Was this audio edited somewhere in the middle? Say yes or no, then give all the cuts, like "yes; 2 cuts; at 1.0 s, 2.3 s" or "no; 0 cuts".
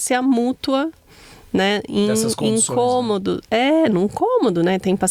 no; 0 cuts